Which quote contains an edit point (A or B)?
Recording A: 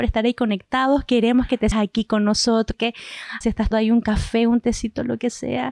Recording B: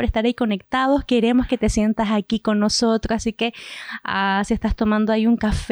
A